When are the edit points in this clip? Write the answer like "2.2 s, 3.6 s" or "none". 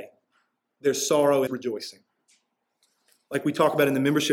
1.5 s